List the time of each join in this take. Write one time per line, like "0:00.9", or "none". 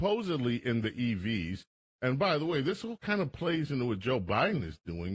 none